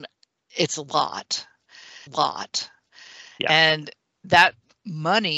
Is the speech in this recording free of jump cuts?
no; 1 cut; at 2.1 s

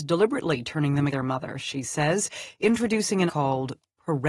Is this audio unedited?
no; 2 cuts; at 1.1 s, 3.3 s

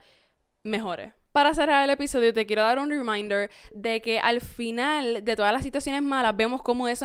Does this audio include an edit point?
yes; 1 cut; at 1.2 s

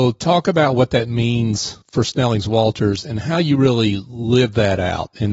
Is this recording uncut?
no; 1 cut; at 1.8 s

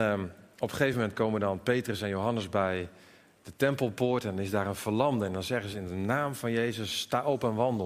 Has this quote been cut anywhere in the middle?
no; 0 cuts

